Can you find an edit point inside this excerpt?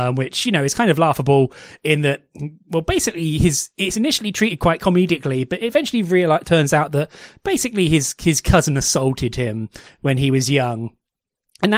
no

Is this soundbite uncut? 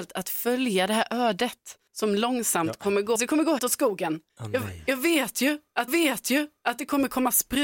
no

